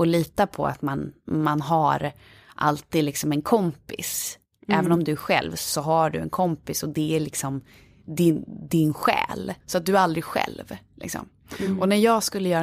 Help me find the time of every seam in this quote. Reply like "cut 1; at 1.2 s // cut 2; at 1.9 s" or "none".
cut 1; at 9.6 s